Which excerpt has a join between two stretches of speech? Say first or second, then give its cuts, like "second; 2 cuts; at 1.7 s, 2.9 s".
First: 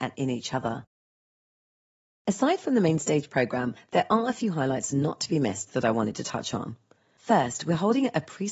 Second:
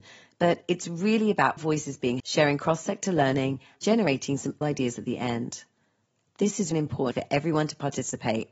second; 6 cuts; at 1.6 s, 2.2 s, 3.8 s, 4.6 s, 6.7 s, 7.1 s